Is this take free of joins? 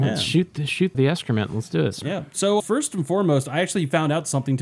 no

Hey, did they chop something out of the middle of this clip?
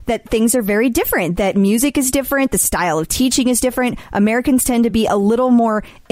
no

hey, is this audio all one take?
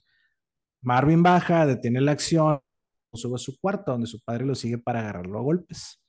yes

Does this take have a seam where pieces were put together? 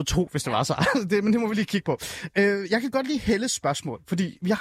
no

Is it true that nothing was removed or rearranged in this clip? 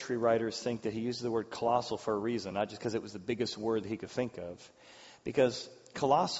yes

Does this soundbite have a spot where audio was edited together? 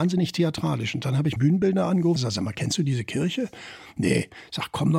yes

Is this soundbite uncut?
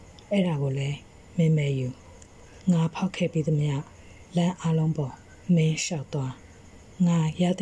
no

